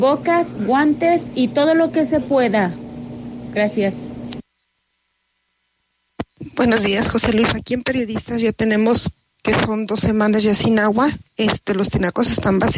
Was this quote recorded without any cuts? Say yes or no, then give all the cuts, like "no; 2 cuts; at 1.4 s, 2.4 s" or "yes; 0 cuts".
yes; 0 cuts